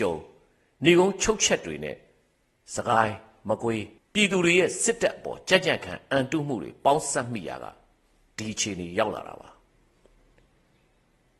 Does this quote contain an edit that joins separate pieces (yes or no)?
yes